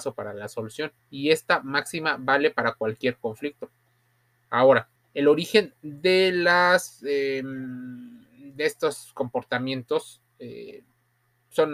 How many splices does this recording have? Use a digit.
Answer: 2